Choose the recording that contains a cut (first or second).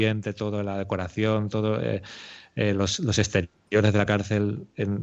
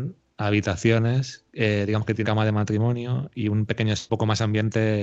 second